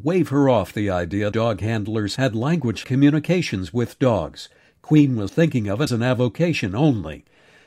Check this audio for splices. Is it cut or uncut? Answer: cut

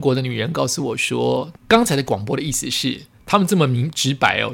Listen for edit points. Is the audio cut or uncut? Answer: cut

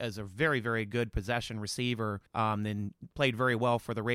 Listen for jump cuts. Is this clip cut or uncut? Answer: cut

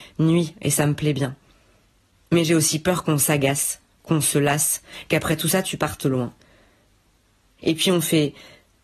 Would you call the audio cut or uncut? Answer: uncut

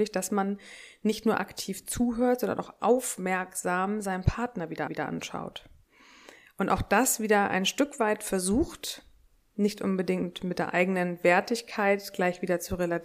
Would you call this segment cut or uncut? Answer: cut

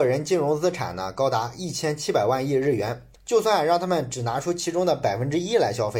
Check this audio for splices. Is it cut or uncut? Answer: cut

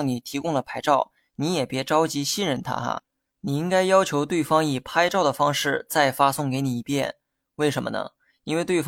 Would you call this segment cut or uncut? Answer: uncut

